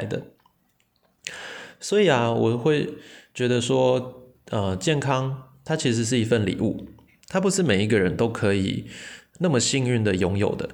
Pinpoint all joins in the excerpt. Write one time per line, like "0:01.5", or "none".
none